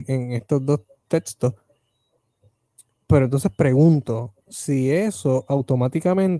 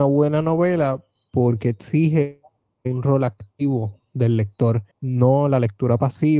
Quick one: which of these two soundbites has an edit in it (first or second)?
second